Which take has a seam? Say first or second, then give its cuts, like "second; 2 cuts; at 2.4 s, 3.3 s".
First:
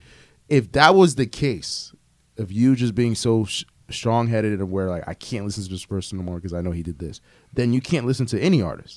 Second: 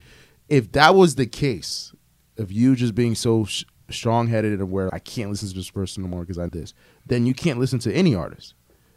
second; 2 cuts; at 4.9 s, 6.5 s